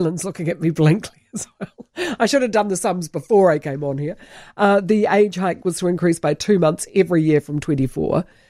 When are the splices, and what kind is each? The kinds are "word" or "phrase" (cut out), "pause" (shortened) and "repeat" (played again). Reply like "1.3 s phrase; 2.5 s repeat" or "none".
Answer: none